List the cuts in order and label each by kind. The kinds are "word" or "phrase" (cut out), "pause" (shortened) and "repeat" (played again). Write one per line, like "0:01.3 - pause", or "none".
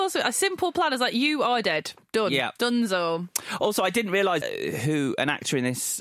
0:04.4 - word